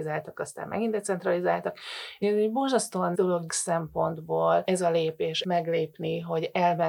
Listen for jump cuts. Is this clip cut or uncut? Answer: cut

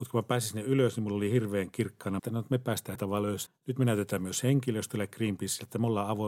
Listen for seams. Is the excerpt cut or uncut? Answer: cut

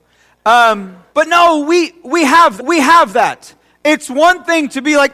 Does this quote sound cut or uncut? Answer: cut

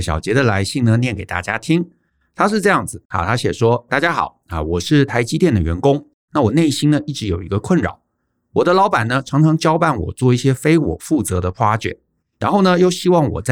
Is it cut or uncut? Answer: uncut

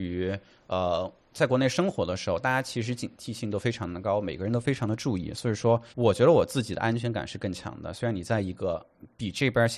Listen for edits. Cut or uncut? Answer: cut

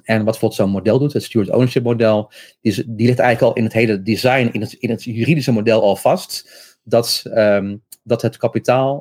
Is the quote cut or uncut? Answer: uncut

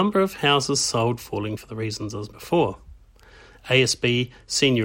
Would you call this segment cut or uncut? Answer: cut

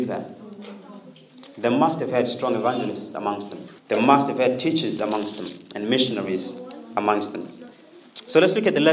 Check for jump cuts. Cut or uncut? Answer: cut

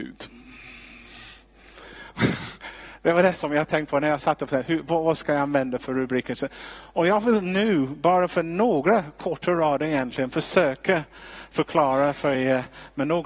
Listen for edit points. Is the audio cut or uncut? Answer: uncut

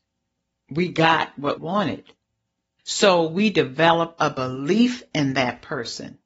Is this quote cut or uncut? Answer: cut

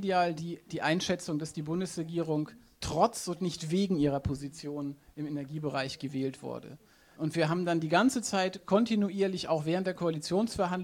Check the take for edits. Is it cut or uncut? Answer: uncut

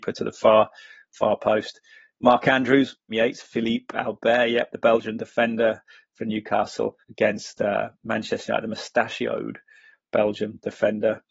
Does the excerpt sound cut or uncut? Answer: cut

